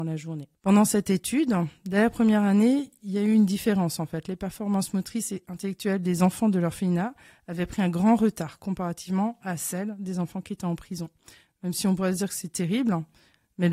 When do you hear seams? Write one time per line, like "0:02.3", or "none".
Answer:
none